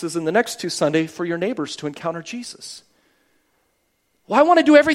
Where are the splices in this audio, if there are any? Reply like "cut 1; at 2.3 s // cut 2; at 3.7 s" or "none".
none